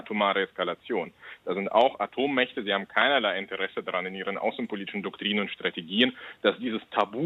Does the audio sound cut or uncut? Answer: uncut